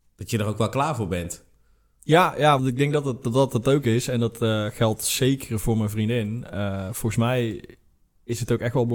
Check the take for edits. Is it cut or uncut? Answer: cut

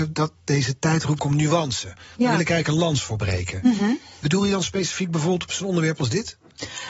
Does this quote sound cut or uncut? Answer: cut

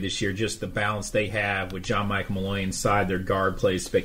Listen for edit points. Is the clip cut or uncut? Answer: uncut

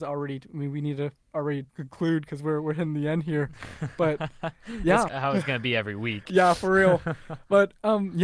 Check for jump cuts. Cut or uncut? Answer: cut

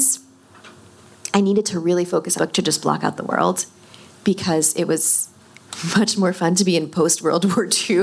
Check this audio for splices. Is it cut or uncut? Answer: cut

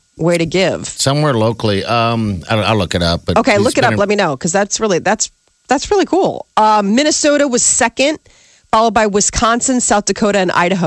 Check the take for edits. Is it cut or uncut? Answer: uncut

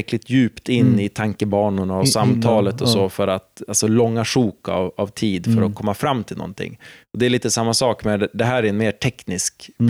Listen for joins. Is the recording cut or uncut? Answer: uncut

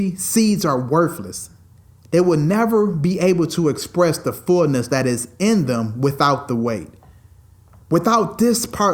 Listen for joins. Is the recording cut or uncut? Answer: uncut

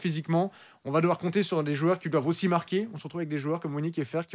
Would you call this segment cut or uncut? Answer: uncut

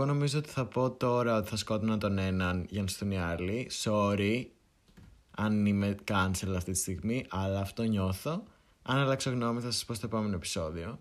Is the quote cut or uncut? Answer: uncut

